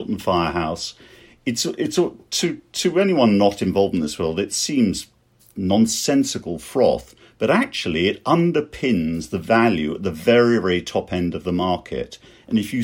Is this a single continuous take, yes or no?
yes